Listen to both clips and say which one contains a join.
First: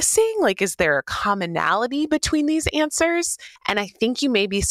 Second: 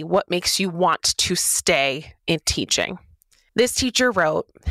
first; 1 cut; at 3.6 s

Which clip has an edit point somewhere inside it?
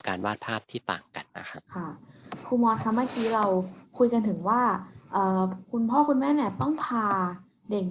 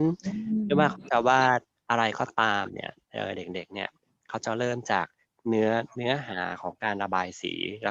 first; 2 cuts; at 1.3 s, 1.7 s

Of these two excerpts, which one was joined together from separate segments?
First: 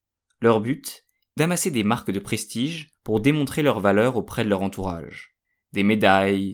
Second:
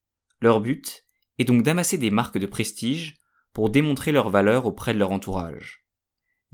first; 3 cuts; at 1.4 s, 3.0 s, 5.4 s

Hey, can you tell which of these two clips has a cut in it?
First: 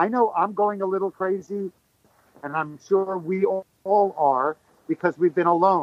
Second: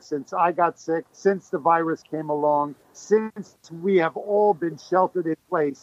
second; 2 cuts; at 1.1 s, 2.8 s

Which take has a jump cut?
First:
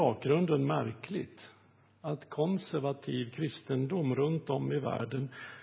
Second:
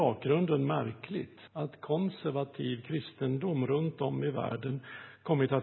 second; 1 cut; at 1.5 s

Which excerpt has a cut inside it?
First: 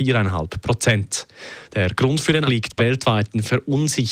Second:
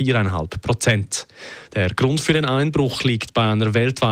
first; 2 cuts; at 2.5 s, 2.8 s

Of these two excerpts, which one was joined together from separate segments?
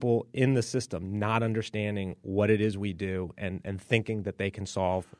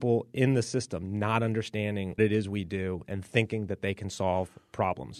second; 2 cuts; at 2.2 s, 3.0 s

